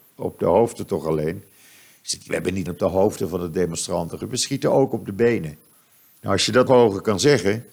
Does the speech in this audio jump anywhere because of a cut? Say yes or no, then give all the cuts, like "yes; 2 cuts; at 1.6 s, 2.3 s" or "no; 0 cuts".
yes; 5 cuts; at 2.3 s, 2.7 s, 4.2 s, 5.7 s, 6.7 s